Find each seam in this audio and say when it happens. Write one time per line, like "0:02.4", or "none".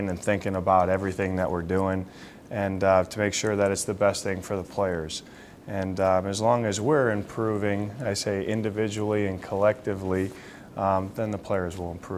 none